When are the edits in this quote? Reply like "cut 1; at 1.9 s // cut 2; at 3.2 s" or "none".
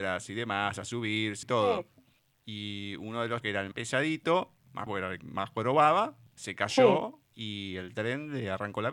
cut 1; at 1.4 s // cut 2; at 2.2 s // cut 3; at 3.4 s // cut 4; at 3.7 s // cut 5; at 4.9 s // cut 6; at 5.2 s // cut 7; at 6.3 s // cut 8; at 7.3 s